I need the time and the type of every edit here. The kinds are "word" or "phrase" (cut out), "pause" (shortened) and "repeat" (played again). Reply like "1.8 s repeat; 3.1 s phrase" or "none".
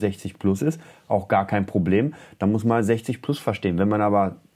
none